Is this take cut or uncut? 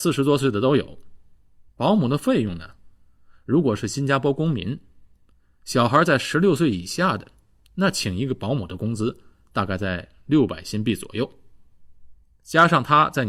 uncut